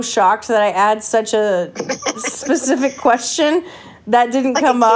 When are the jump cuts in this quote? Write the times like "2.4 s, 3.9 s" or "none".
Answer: none